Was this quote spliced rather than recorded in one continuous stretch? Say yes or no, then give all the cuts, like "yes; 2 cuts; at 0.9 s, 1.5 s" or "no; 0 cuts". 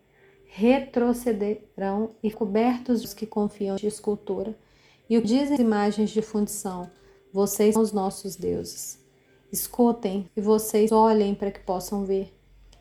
yes; 8 cuts; at 2.3 s, 3.0 s, 3.8 s, 5.2 s, 5.6 s, 7.8 s, 10.3 s, 10.9 s